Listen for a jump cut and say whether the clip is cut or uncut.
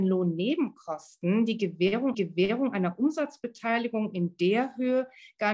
cut